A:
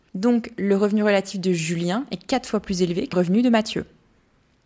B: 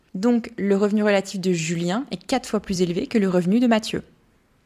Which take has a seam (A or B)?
A